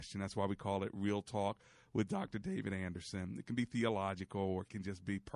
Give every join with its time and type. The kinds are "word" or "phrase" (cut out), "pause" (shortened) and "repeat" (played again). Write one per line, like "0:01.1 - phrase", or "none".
none